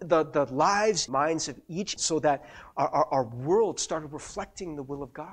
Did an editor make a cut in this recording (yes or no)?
yes